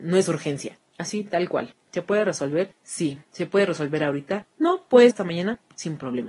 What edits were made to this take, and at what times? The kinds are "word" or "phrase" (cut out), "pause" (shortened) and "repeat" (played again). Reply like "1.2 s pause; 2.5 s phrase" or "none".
3.2 s pause; 5.1 s word